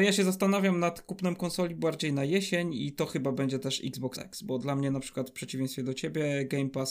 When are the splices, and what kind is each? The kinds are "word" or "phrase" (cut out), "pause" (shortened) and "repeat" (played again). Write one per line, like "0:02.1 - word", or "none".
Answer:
0:04.2 - word